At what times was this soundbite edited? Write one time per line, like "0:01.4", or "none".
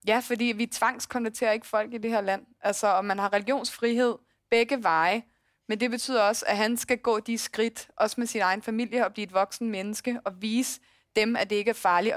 none

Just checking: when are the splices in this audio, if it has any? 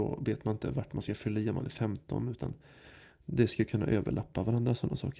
none

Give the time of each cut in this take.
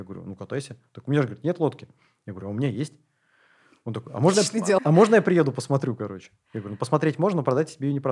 0:04.8

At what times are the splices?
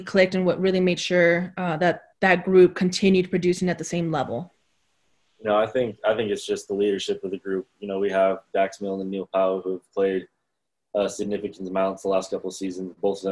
0:02.1

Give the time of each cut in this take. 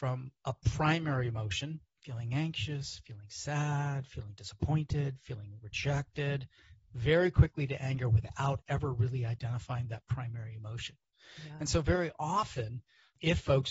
none

